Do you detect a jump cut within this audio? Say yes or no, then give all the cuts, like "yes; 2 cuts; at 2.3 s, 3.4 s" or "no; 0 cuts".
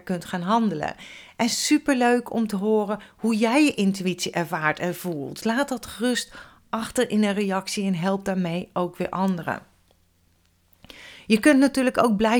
no; 0 cuts